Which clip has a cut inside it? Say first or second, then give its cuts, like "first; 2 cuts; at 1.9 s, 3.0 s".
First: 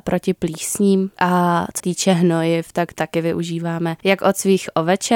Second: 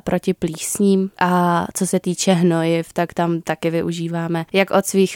first; 2 cuts; at 1.8 s, 2.9 s